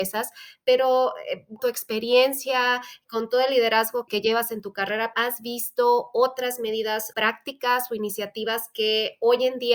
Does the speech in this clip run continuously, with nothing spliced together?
no; 4 cuts; at 1.6 s, 4.1 s, 5.1 s, 7.1 s

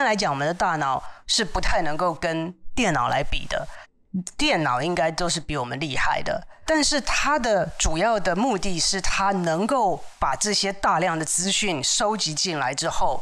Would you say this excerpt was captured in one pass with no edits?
yes; 0 cuts

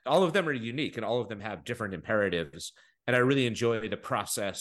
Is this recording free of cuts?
yes; 0 cuts

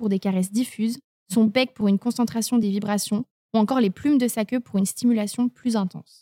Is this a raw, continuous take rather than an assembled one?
yes; 0 cuts

